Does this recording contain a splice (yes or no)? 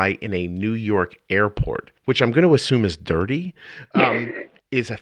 yes